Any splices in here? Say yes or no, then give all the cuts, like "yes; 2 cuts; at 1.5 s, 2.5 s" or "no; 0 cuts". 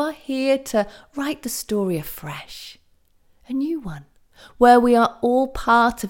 no; 0 cuts